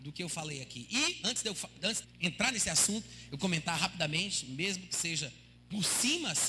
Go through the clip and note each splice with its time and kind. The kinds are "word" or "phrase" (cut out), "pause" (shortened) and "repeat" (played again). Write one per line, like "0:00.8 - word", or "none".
0:02.0 - word
0:03.4 - word
0:05.6 - pause